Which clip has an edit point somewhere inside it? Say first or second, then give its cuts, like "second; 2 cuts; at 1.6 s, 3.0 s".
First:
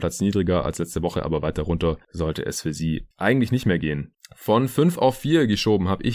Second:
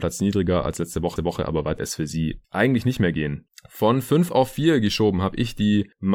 second; 2 cuts; at 1.2 s, 1.8 s